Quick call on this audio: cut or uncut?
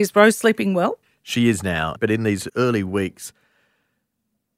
cut